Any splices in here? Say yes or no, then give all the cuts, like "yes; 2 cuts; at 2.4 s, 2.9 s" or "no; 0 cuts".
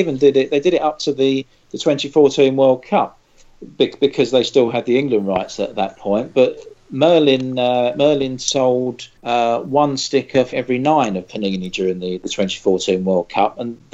yes; 2 cuts; at 9.2 s, 10.5 s